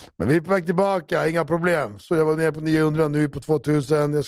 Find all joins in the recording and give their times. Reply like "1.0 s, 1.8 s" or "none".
none

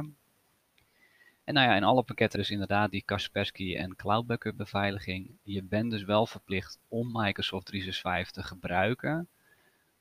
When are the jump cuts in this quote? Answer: 2.4 s

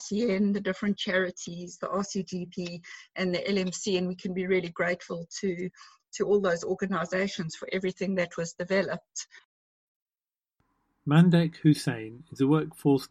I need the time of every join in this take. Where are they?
none

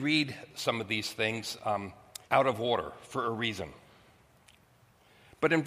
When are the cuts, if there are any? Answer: 2.2 s

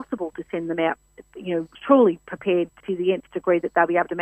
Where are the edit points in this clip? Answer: 1.7 s, 2.8 s

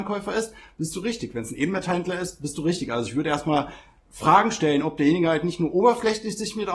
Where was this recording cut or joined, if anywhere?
none

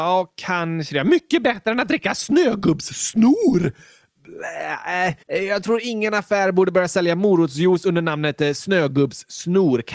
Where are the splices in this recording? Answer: 5.2 s

